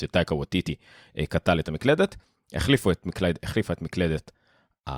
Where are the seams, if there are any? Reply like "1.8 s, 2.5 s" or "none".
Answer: none